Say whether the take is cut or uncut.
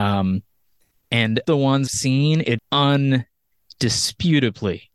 cut